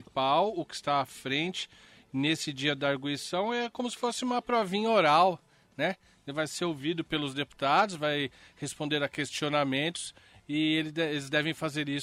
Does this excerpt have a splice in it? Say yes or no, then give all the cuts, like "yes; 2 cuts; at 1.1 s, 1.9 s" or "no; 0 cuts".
no; 0 cuts